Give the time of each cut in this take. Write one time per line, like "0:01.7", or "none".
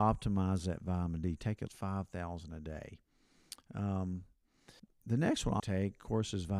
0:01.7
0:04.8
0:05.6